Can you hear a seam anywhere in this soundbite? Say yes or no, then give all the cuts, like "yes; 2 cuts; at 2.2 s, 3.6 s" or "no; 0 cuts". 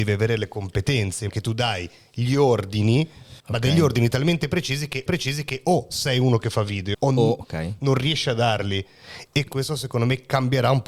yes; 6 cuts; at 1.3 s, 3.4 s, 5.1 s, 6.9 s, 7.4 s, 9.5 s